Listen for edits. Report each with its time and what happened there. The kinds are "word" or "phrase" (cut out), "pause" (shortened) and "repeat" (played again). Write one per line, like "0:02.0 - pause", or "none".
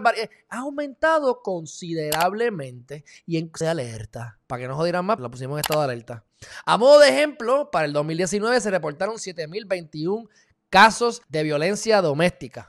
0:03.6 - phrase
0:04.4 - pause
0:05.2 - word
0:11.2 - pause